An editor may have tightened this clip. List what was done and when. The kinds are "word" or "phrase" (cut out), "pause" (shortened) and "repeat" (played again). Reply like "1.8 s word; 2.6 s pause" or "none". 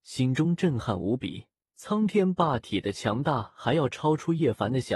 1.6 s pause